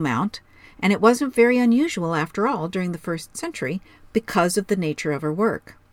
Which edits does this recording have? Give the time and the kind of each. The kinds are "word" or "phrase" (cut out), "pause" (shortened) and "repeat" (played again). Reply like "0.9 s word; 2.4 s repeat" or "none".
none